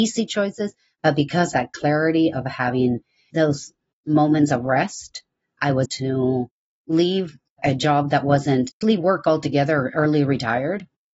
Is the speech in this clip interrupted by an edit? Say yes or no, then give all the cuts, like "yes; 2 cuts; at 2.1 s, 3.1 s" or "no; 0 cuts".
yes; 4 cuts; at 1.5 s, 3.3 s, 5.9 s, 8.8 s